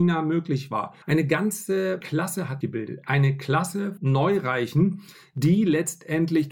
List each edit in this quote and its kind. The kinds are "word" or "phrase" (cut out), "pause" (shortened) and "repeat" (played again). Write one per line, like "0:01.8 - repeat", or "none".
0:01.0 - pause
0:02.0 - word
0:02.6 - word
0:04.0 - word
0:05.1 - pause